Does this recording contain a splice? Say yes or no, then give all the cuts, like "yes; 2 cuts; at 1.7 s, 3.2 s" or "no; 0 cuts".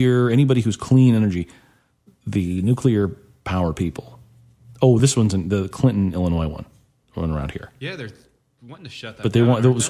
no; 0 cuts